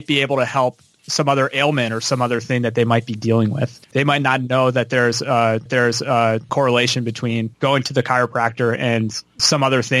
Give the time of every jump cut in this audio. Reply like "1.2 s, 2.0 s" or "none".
3.8 s, 5.7 s, 7.5 s